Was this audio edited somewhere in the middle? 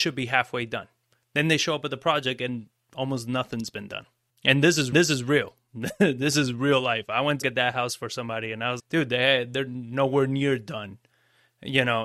yes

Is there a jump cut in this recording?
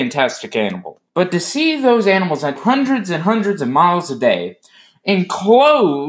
yes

